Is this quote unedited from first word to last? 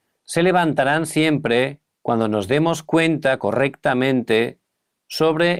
no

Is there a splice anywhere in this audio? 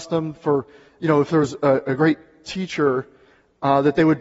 no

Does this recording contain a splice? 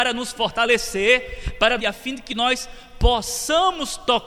yes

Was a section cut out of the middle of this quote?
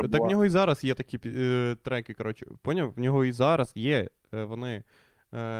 no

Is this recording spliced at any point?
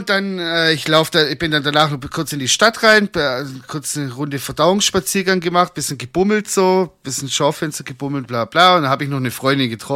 no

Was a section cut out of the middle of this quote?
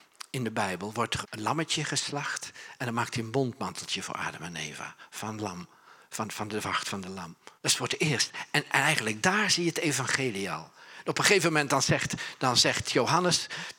yes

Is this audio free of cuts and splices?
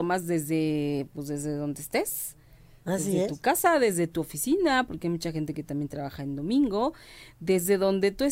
yes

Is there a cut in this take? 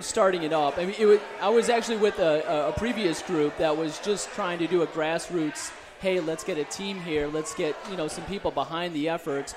no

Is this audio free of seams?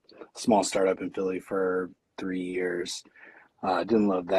yes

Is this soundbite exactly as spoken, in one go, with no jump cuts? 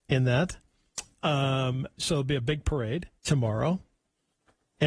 no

